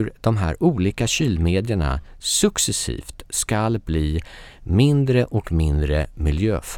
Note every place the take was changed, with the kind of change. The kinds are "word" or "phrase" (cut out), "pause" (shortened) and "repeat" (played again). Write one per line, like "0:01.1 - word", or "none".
none